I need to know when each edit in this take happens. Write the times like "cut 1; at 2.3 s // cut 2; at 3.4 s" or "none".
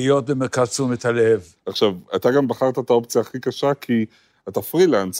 none